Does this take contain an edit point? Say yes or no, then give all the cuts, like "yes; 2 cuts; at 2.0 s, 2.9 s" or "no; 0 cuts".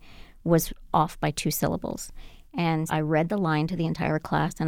yes; 1 cut; at 2.9 s